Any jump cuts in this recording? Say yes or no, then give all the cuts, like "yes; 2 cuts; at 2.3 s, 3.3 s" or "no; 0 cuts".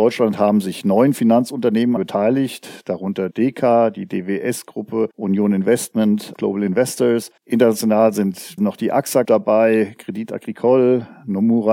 yes; 7 cuts; at 2.0 s, 3.3 s, 5.1 s, 6.3 s, 7.4 s, 8.6 s, 9.2 s